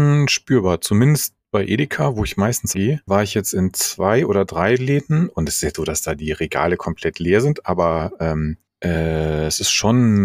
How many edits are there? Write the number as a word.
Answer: three